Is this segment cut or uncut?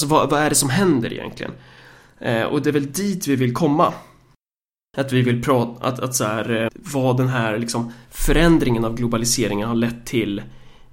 cut